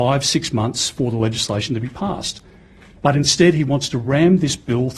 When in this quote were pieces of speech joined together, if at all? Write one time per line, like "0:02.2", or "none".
none